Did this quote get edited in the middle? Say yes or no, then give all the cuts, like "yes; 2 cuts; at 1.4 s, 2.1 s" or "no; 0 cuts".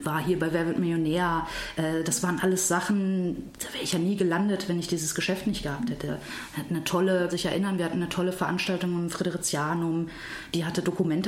yes; 1 cut; at 7.3 s